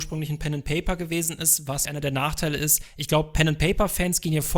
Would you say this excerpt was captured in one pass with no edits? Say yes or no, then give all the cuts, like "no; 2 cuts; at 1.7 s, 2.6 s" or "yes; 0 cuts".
no; 1 cut; at 1.8 s